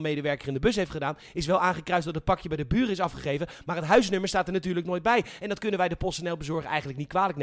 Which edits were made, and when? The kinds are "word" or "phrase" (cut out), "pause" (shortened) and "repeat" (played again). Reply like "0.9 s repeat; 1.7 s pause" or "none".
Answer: none